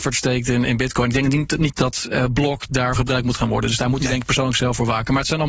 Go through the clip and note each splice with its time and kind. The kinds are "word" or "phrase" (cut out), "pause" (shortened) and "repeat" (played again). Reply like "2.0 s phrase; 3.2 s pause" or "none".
1.7 s word; 3.0 s phrase